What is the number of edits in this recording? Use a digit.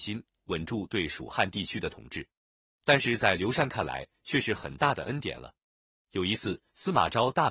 0